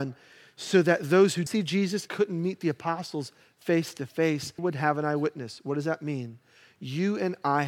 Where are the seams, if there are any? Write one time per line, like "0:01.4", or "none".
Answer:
0:01.5
0:02.1
0:04.6

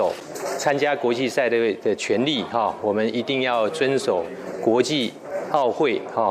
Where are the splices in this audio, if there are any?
none

